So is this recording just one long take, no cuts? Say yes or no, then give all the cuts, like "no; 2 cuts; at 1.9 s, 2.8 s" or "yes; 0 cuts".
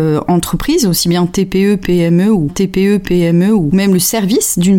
no; 1 cut; at 2.5 s